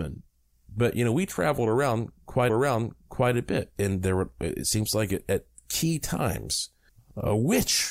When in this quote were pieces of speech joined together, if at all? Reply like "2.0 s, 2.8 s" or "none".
2.5 s, 6.9 s